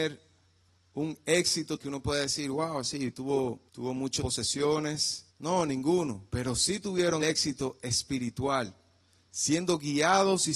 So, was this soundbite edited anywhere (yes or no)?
yes